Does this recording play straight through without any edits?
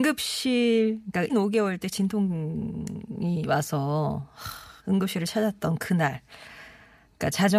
no; 2 cuts; at 1.3 s, 4.8 s

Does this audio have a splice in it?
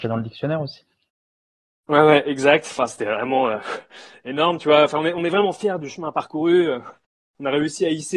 no; 0 cuts

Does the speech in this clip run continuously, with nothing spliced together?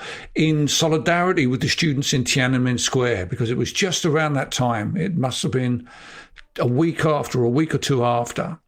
yes; 0 cuts

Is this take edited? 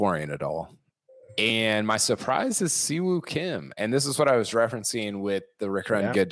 no; 0 cuts

